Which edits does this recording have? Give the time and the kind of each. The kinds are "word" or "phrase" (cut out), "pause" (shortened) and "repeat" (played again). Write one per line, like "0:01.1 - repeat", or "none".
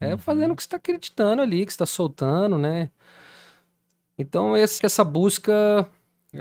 0:04.8 - word